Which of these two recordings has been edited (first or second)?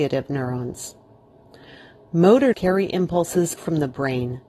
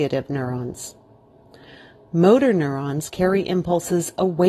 first